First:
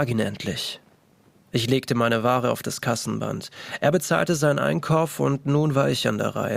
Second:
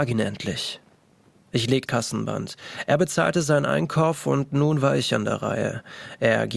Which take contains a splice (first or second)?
second